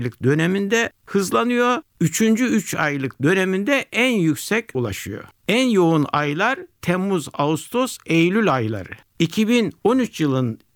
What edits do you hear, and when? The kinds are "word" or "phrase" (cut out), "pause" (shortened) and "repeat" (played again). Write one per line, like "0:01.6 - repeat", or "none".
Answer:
0:04.7 - word